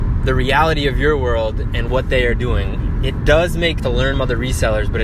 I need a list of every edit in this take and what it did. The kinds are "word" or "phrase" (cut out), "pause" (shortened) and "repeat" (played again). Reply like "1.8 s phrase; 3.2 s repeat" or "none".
1.9 s word; 3.8 s word; 4.1 s word